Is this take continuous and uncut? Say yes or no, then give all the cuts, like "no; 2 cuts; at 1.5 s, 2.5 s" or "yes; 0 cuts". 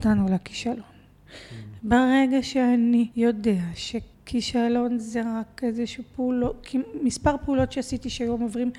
no; 2 cuts; at 3.1 s, 4.1 s